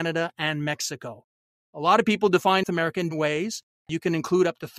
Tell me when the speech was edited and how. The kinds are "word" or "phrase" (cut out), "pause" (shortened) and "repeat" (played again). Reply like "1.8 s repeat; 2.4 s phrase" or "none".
2.6 s word; 3.1 s word